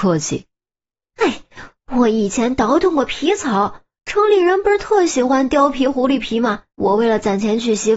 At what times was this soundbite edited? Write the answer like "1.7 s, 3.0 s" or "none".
6.7 s